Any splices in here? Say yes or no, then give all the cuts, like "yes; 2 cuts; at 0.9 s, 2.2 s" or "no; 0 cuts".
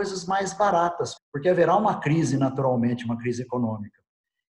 yes; 1 cut; at 1.2 s